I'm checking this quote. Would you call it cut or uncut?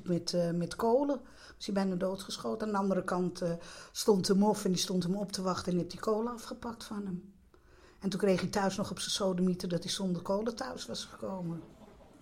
uncut